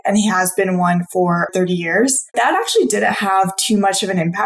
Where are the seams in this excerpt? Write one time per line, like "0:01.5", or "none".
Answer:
0:01.5
0:02.3